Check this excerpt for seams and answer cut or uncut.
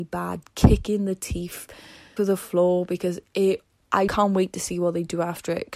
cut